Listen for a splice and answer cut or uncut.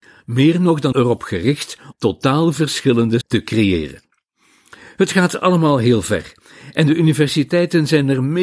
cut